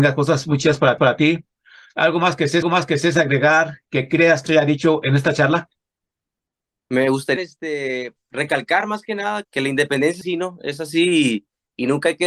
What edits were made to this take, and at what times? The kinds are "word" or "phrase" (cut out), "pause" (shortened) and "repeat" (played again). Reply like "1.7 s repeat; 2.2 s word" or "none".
1.0 s repeat; 2.6 s repeat; 4.5 s phrase; 7.4 s word; 8.2 s word; 9.4 s word; 10.2 s word